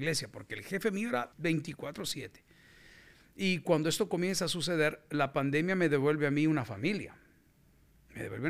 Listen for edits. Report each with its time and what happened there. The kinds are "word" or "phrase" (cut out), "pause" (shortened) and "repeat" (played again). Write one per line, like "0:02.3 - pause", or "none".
0:01.3 - pause